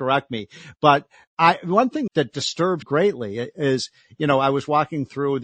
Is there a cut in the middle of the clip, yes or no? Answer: yes